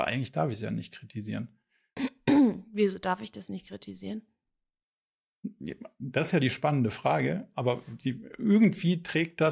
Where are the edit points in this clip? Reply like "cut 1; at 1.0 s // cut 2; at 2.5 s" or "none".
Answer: none